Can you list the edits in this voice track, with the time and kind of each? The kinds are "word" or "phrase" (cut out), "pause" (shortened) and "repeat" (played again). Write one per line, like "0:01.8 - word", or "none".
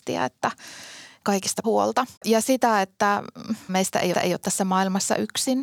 0:01.6 - word
0:02.2 - pause
0:03.7 - word
0:04.1 - repeat